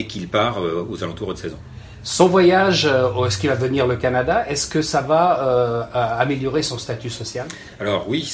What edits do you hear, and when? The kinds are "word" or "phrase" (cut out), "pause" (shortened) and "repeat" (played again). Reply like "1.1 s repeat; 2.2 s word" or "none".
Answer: none